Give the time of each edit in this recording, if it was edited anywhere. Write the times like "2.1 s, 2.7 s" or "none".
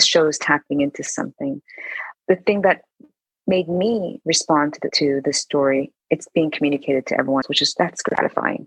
7.4 s